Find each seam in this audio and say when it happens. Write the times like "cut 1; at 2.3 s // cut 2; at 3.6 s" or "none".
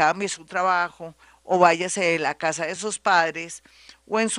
none